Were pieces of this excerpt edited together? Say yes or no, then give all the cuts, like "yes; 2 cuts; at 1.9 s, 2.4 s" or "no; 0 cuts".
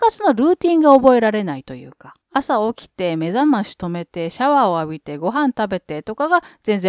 yes; 1 cut; at 2.2 s